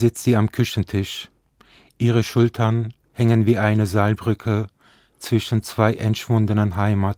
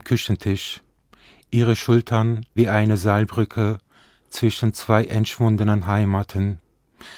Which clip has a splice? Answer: second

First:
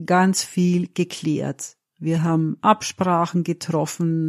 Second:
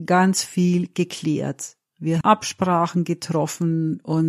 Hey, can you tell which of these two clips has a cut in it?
second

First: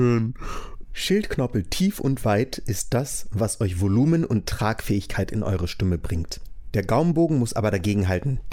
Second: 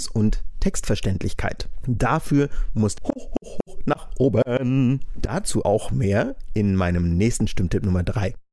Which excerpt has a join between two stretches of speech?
second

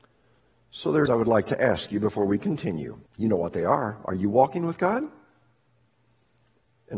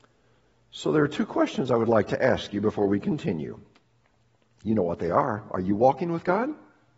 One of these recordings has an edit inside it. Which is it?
first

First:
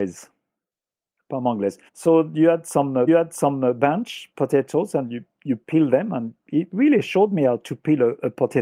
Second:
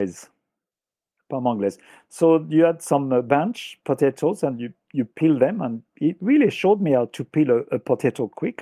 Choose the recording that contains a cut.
first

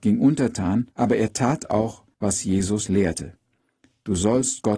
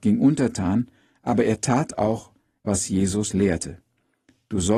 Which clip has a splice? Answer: first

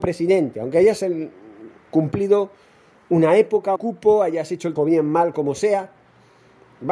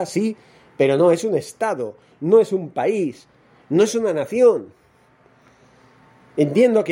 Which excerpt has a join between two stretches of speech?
first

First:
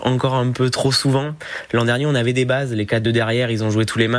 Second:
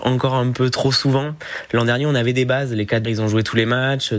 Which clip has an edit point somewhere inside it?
second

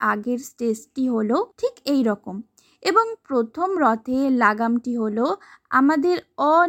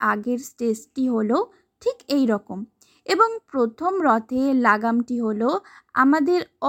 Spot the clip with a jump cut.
first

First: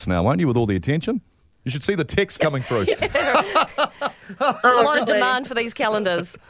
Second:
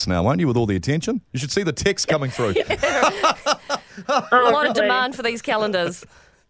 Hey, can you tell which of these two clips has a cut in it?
second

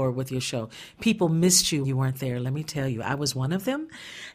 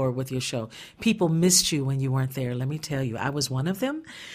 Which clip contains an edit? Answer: first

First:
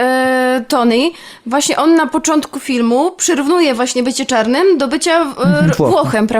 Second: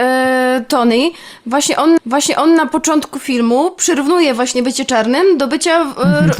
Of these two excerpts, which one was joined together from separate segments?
second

